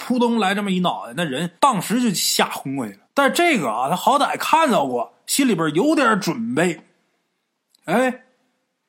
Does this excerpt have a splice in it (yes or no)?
yes